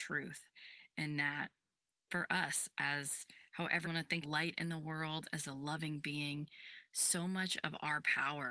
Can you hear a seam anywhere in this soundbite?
yes; 2 cuts; at 3.8 s, 4.2 s

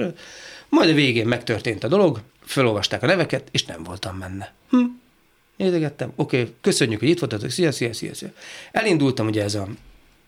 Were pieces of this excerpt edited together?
yes; 3 cuts; at 2.3 s, 4.6 s, 6.6 s

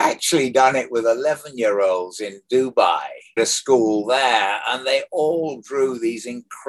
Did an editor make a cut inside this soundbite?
yes; 1 cut; at 3.4 s

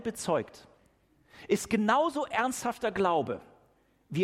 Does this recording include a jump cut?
no; 0 cuts

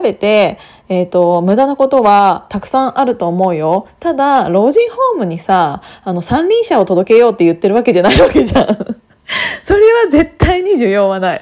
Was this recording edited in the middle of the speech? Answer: no; 0 cuts

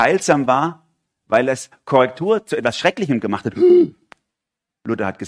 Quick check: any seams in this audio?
no; 0 cuts

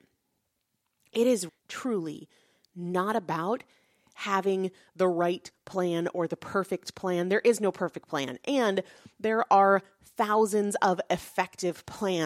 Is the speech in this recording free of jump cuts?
no; 1 cut; at 1.5 s

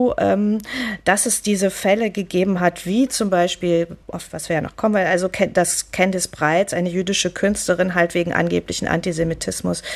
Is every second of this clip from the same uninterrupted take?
no; 1 cut; at 4.0 s

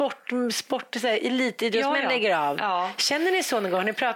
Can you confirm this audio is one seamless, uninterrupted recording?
yes; 0 cuts

